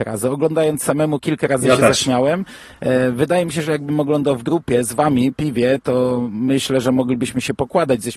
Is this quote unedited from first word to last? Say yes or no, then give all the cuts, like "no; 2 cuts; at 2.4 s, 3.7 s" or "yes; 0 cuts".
no; 1 cut; at 5.3 s